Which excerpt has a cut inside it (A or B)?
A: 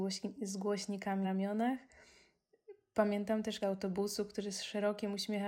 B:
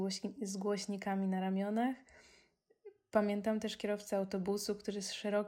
A